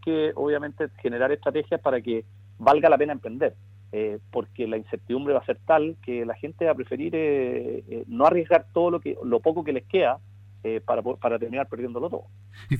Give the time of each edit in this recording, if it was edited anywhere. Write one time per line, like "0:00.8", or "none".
none